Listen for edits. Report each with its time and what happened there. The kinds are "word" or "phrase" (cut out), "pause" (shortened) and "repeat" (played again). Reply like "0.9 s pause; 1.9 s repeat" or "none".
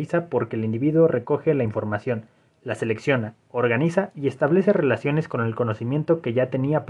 none

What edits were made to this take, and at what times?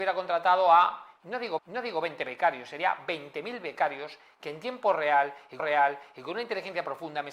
1.6 s repeat; 5.6 s repeat

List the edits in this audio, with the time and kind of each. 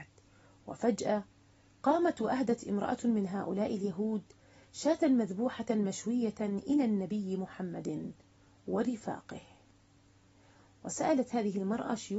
none

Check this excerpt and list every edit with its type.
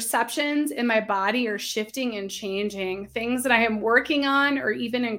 none

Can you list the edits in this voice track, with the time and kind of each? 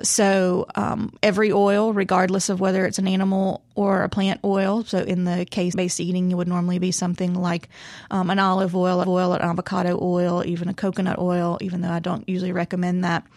1.2 s pause; 5.7 s phrase; 9.0 s repeat

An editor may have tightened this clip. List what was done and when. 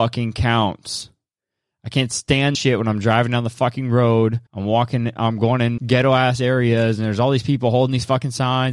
2.5 s word; 4.5 s pause; 5.8 s word

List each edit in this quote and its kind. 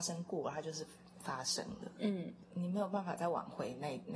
none

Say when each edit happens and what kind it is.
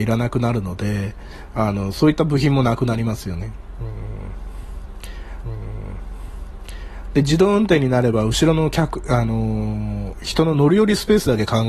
5.4 s repeat

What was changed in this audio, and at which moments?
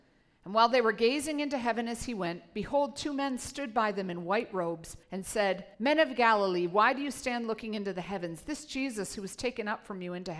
5.0 s pause; 5.7 s pause

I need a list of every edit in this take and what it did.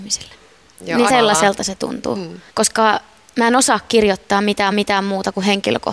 1.1 s word; 2.5 s pause; 4.7 s repeat

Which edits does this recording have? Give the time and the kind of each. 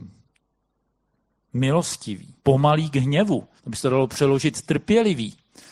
2.4 s pause; 3.6 s pause

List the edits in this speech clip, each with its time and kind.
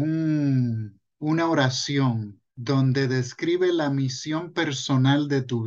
1.1 s pause; 2.5 s pause

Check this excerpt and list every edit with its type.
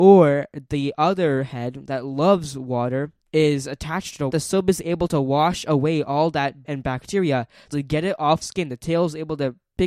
3.2 s pause; 4.3 s phrase; 6.6 s word; 7.7 s word; 8.4 s word

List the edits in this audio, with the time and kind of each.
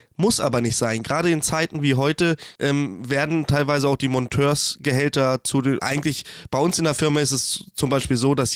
2.6 s pause; 5.8 s word

